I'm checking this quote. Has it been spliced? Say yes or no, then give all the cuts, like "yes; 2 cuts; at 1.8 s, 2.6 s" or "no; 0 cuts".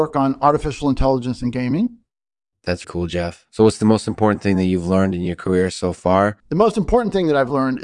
yes; 2 cuts; at 2.8 s, 6.4 s